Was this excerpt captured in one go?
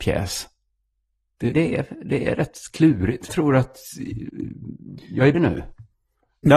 no; 3 cuts; at 1.5 s, 3.3 s, 5.3 s

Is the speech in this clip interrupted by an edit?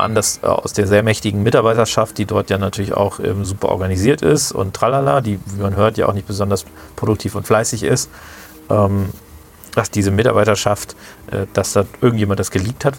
no; 0 cuts

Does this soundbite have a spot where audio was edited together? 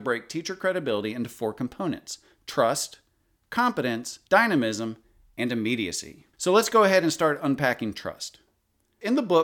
yes; 2 cuts; at 4.3 s, 6.3 s

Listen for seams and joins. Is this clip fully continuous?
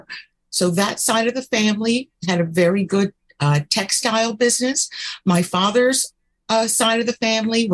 yes; 0 cuts

